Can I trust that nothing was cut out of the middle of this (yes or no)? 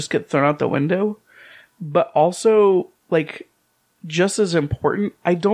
yes